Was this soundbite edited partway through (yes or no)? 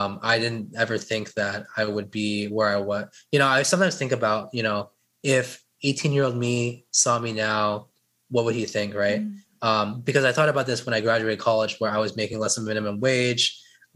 no